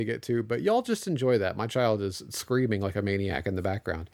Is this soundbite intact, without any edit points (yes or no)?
yes